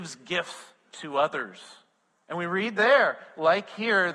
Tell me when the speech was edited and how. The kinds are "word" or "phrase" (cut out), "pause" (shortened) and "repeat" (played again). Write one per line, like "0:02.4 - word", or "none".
0:02.0 - pause